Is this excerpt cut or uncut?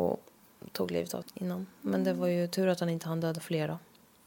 cut